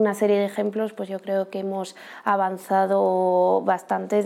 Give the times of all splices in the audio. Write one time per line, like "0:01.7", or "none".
none